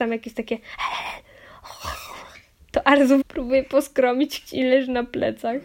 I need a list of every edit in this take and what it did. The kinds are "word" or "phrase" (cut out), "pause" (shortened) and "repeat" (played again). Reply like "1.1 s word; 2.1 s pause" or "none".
3.2 s word; 4.5 s word

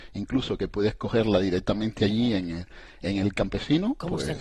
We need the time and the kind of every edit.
none

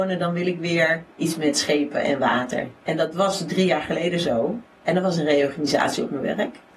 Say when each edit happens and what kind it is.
1.1 s pause; 2.8 s pause; 4.7 s pause

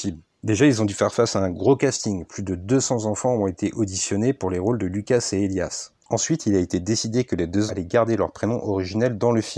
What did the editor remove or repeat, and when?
7.7 s word

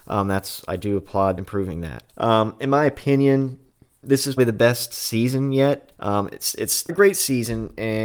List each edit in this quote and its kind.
1.4 s phrase; 2.1 s pause; 4.4 s word; 6.0 s pause; 6.9 s word

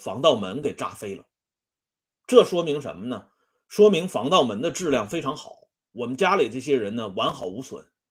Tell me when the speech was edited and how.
none

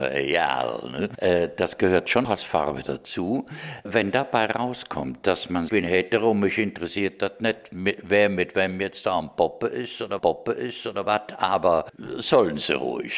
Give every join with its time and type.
2.2 s word; 5.7 s phrase; 10.2 s repeat

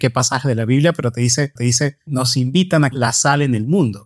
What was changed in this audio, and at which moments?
1.6 s repeat; 2.9 s phrase

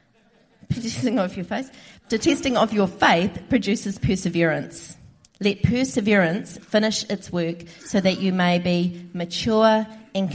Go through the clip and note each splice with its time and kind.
none

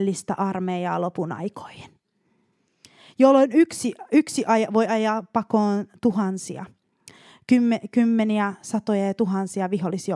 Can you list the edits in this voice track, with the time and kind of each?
none

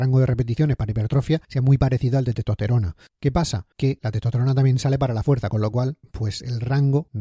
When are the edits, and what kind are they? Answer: 3.7 s pause

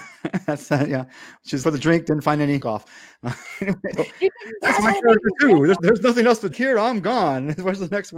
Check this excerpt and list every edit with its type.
1.6 s word; 2.6 s word; 4.0 s word; 5.8 s word; 6.5 s word

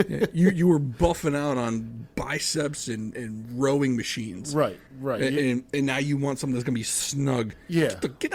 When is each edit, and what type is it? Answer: 4.9 s pause

